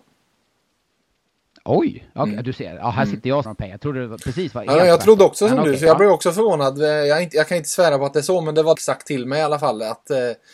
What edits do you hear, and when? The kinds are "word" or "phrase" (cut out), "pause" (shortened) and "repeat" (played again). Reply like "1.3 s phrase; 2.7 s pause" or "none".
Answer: 3.4 s word; 8.7 s phrase